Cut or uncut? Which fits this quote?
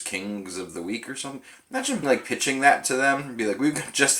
cut